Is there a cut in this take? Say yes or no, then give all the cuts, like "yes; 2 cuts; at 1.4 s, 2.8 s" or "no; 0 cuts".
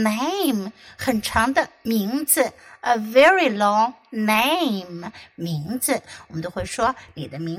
no; 0 cuts